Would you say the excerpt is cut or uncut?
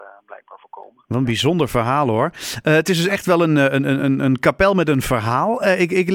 uncut